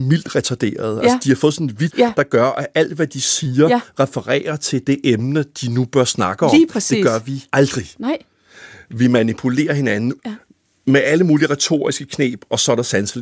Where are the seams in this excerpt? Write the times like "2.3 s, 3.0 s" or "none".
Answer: 1.9 s, 7.5 s, 10.2 s